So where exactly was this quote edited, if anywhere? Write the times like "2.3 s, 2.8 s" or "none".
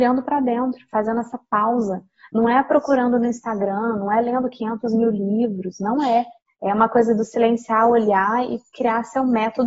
6.4 s